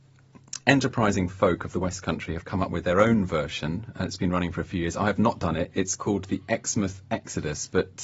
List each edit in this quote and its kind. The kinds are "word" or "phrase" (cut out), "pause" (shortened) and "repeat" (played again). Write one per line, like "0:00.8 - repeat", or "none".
none